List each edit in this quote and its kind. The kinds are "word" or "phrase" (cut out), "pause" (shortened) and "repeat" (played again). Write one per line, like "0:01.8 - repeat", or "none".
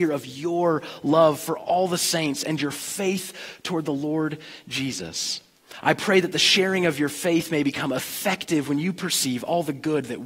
none